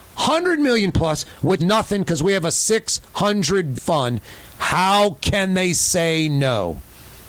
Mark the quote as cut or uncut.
cut